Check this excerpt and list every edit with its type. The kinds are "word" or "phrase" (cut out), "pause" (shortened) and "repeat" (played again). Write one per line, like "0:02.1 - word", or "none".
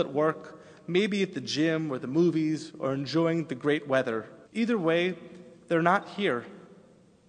0:04.4 - pause